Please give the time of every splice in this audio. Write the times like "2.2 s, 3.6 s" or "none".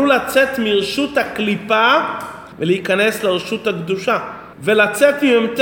2.5 s, 4.5 s